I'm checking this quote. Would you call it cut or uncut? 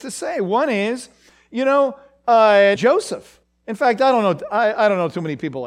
cut